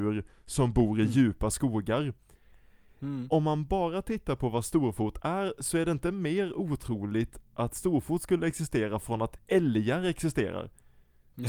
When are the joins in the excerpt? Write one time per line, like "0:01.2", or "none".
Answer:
none